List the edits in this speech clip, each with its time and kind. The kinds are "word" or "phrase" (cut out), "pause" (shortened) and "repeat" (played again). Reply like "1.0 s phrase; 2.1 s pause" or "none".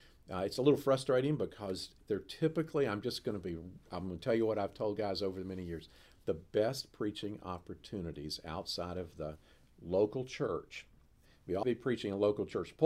11.6 s word